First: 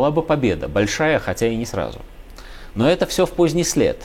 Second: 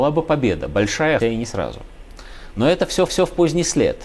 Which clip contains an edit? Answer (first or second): second